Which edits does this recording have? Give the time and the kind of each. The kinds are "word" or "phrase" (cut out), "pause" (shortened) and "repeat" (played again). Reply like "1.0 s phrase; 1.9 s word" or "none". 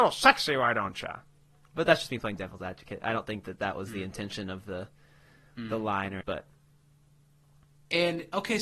6.2 s word

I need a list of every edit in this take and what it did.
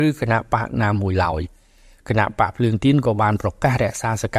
none

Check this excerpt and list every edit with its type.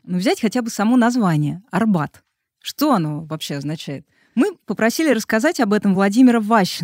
none

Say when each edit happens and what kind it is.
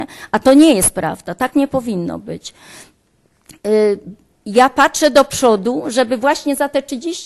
none

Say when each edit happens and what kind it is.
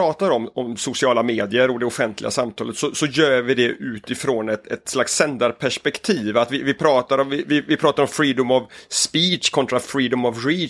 none

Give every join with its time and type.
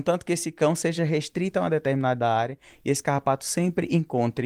none

